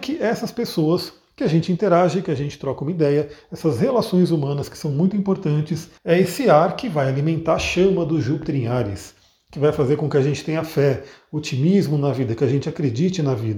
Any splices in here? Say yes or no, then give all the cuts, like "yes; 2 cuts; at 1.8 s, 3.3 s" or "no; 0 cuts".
yes; 1 cut; at 6.0 s